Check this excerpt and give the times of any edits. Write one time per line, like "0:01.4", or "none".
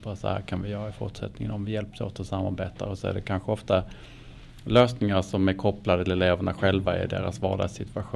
0:06.1